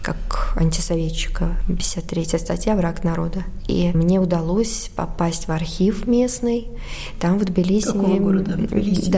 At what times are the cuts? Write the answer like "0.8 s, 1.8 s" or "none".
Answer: none